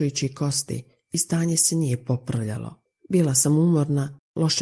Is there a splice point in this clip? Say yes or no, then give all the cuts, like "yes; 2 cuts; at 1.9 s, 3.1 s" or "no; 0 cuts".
yes; 1 cut; at 2.9 s